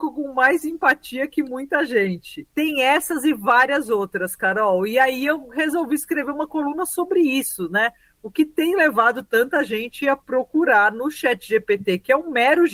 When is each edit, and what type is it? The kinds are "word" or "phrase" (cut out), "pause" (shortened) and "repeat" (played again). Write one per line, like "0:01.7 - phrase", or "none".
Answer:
0:02.5 - pause